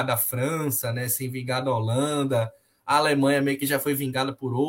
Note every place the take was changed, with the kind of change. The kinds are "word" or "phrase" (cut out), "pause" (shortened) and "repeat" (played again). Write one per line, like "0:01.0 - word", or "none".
none